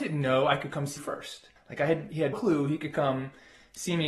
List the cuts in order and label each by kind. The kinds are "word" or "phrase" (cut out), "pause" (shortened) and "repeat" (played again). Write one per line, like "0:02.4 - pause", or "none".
0:01.0 - word
0:01.6 - pause
0:02.3 - word